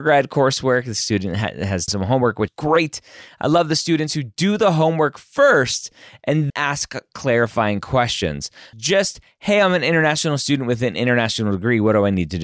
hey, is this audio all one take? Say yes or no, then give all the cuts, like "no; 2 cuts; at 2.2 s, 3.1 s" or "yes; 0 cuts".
no; 4 cuts; at 1.9 s, 2.5 s, 6.5 s, 8.7 s